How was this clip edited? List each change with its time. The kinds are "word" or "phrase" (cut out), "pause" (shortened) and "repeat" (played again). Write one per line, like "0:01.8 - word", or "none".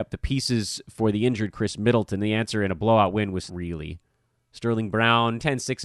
0:03.5 - word